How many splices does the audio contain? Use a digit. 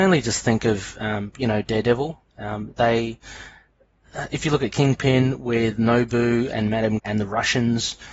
1